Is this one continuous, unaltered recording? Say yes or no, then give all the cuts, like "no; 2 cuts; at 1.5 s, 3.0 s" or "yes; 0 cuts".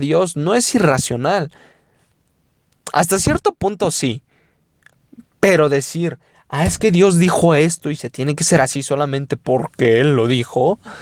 yes; 0 cuts